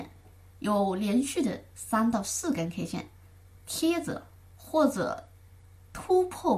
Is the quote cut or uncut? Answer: uncut